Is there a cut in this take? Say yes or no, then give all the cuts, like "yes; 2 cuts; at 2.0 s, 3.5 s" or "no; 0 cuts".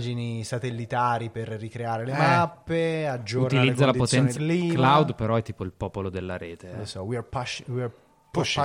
yes; 1 cut; at 4.4 s